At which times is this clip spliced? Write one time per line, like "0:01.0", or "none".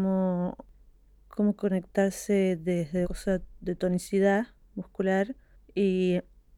0:03.0